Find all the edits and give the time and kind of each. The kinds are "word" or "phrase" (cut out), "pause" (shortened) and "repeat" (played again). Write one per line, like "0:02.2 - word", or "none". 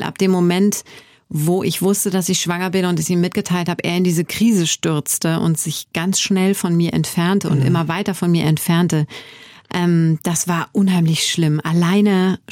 none